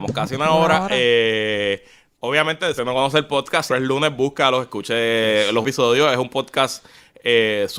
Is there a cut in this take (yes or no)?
yes